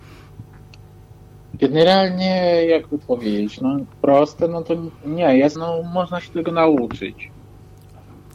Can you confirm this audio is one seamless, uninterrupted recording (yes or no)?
no